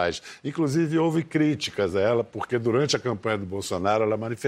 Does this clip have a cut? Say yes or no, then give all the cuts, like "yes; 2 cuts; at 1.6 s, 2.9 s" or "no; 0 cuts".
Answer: no; 0 cuts